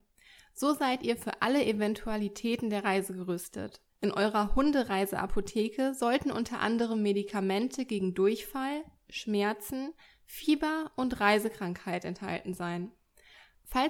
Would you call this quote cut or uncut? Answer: cut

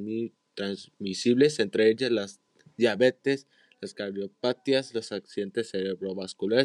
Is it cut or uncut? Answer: uncut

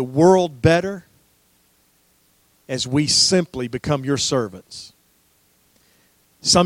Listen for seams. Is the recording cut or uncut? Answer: uncut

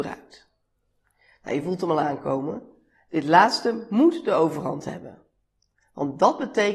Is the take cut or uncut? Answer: uncut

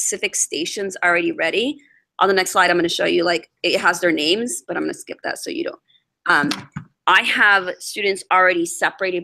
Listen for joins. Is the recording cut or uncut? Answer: uncut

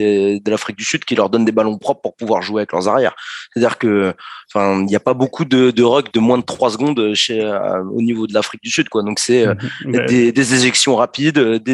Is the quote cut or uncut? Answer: uncut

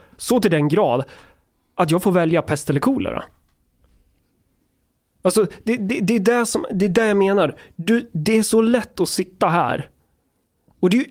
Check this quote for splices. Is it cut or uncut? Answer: uncut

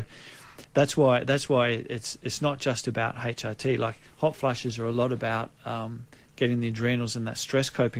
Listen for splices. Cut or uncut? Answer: uncut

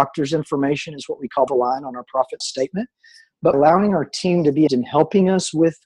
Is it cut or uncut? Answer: cut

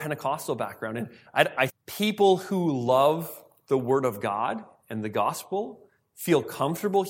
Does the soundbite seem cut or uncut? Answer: cut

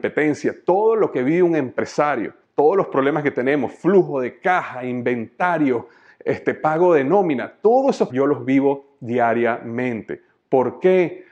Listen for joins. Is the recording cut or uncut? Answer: cut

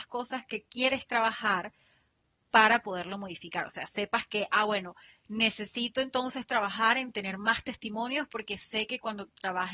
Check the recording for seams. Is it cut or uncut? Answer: uncut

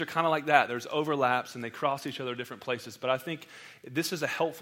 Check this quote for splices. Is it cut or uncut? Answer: uncut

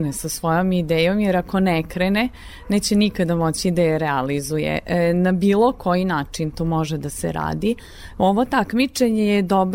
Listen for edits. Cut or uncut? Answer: uncut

